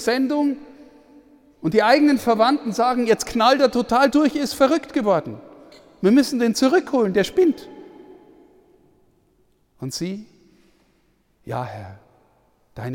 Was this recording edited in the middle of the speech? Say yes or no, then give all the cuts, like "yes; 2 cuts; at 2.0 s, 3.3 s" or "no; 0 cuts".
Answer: no; 0 cuts